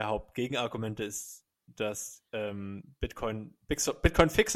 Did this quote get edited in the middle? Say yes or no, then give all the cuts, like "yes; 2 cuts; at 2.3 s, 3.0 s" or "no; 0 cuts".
no; 0 cuts